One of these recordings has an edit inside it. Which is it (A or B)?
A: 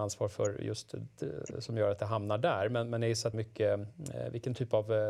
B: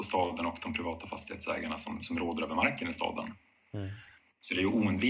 A